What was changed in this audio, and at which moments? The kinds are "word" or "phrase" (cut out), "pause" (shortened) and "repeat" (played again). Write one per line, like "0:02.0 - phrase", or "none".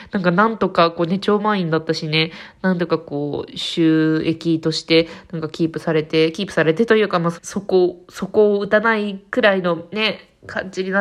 0:07.4 - phrase